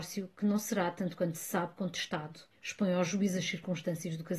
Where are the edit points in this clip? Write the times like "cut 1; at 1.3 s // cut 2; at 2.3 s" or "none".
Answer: cut 1; at 2.5 s